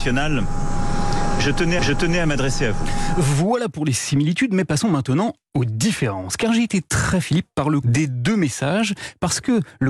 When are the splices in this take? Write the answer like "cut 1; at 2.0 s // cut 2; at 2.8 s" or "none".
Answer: cut 1; at 1.8 s // cut 2; at 7.2 s // cut 3; at 7.8 s